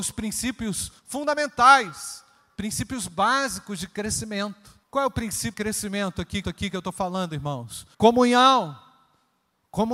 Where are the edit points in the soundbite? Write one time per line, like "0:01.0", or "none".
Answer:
0:01.0
0:04.8
0:05.5
0:06.4
0:07.9